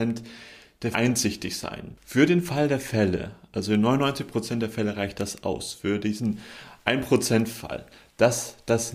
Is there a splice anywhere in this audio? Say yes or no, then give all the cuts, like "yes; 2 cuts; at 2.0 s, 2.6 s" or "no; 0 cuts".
yes; 1 cut; at 0.9 s